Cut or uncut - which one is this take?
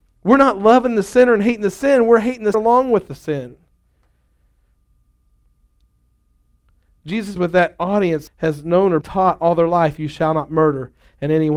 cut